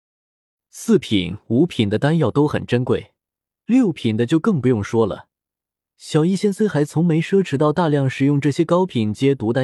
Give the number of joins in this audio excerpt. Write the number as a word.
zero